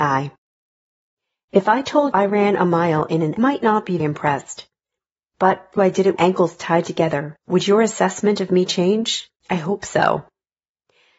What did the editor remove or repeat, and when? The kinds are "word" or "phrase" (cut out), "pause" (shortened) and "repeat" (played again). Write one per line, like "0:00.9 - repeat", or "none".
0:02.1 - word
0:03.4 - phrase
0:04.0 - word
0:05.8 - phrase
0:06.2 - phrase
0:07.4 - pause
0:09.4 - pause